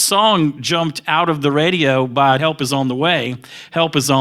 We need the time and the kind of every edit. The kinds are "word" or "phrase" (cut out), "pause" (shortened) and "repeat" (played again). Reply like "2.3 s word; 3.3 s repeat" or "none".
2.4 s phrase